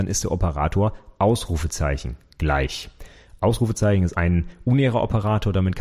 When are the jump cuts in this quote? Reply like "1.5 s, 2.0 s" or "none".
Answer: 4.1 s